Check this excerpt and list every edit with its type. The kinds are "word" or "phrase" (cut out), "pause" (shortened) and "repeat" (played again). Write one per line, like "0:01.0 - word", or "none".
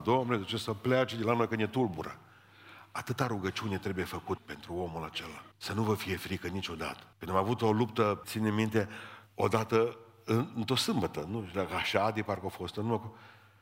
0:04.4 - word
0:05.5 - pause
0:07.1 - pause
0:08.2 - word
0:09.3 - pause

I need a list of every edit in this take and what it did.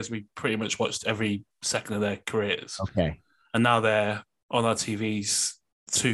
none

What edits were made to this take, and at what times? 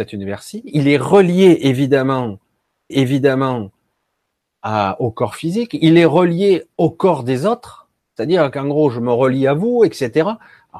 0:02.9 - repeat
0:06.7 - pause

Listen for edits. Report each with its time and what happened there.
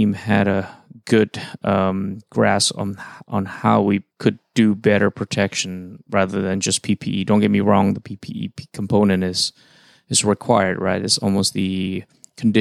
0:04.1 - pause

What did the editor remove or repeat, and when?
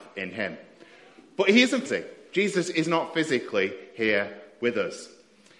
0:01.9 - phrase

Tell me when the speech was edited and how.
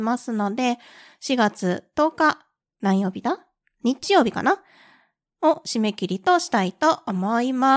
none

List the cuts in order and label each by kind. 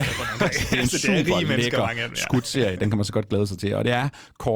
none

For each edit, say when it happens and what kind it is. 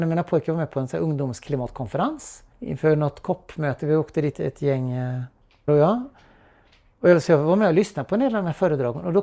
0:02.5 - pause
0:04.3 - phrase
0:05.7 - word

